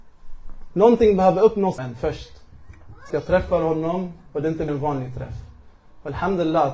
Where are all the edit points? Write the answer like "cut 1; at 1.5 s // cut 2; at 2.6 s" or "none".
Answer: cut 1; at 1.8 s // cut 2; at 3.1 s // cut 3; at 4.7 s

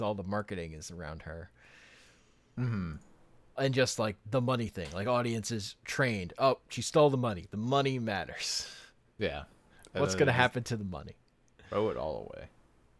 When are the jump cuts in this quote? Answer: cut 1; at 3.6 s

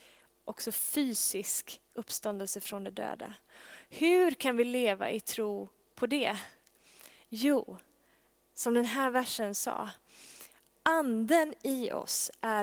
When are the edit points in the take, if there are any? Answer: none

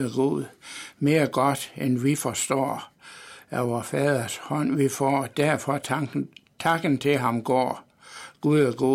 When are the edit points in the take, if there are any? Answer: none

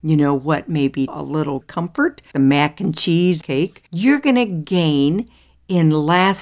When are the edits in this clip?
cut 1; at 1.1 s // cut 2; at 1.6 s // cut 3; at 2.3 s // cut 4; at 3.4 s // cut 5; at 3.9 s

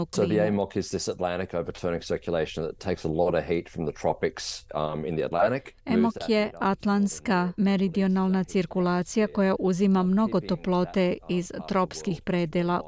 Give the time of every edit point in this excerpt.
cut 1; at 5.8 s

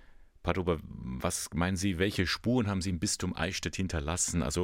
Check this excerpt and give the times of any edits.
none

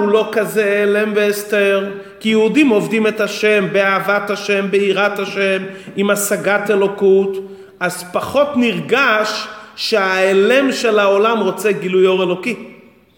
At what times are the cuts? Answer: none

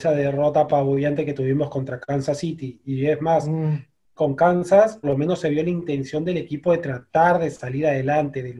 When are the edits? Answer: cut 1; at 5.0 s

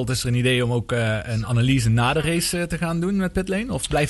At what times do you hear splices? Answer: none

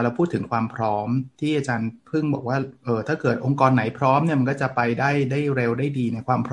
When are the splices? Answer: cut 1; at 1.3 s

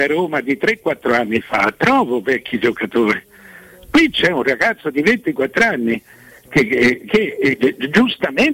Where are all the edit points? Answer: none

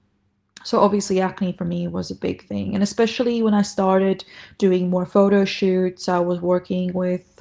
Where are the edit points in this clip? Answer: none

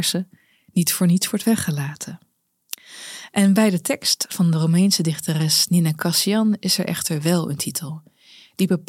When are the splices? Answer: none

